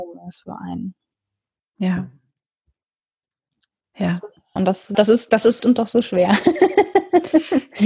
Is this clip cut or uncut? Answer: cut